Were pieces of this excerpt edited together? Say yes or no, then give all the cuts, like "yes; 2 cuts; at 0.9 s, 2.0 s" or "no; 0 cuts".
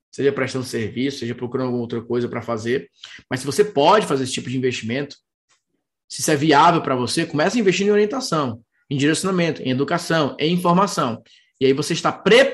no; 0 cuts